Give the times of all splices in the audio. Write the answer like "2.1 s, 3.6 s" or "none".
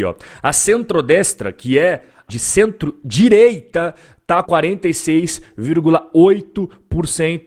2.3 s, 4.5 s